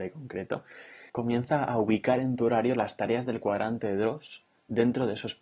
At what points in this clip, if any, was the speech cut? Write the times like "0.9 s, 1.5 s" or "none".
1.1 s